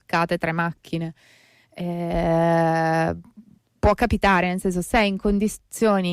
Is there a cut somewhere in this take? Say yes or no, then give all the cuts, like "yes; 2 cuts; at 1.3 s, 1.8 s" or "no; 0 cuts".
no; 0 cuts